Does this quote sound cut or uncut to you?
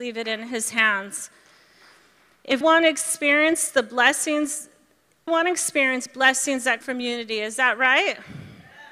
cut